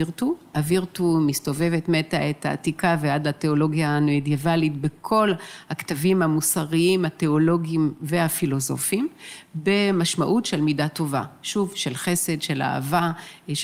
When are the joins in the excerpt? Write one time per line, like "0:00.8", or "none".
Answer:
none